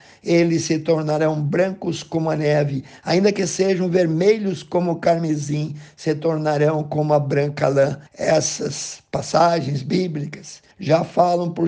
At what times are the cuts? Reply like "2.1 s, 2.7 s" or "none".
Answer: 8.1 s, 10.7 s